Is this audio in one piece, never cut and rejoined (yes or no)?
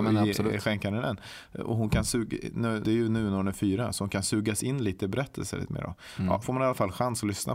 no